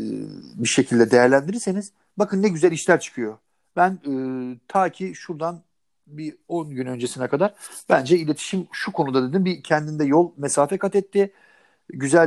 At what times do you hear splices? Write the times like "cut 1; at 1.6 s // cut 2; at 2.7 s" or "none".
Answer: none